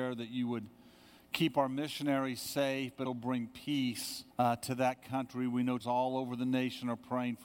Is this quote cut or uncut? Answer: cut